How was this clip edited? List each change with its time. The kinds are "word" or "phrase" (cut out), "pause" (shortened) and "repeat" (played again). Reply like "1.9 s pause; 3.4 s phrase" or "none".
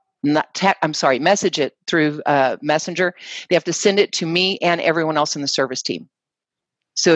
none